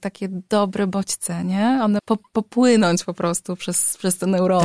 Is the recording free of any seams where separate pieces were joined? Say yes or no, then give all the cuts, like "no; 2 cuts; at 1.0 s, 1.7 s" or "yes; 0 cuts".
no; 1 cut; at 2.0 s